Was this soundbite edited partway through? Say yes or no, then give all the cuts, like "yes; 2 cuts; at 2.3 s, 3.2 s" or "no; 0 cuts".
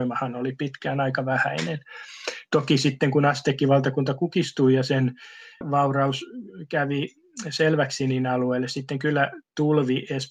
no; 0 cuts